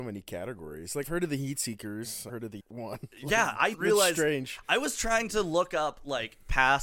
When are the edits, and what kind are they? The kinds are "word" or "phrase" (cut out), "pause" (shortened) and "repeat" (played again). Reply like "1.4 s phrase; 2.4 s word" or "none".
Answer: 1.0 s word; 2.3 s word; 2.6 s word; 3.7 s word